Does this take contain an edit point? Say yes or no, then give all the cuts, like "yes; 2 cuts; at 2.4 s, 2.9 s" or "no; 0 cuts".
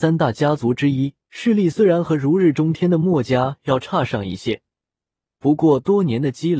yes; 1 cut; at 1.2 s